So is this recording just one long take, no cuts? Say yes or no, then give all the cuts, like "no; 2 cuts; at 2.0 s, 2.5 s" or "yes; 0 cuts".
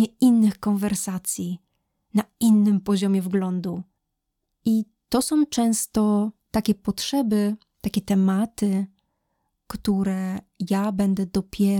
yes; 0 cuts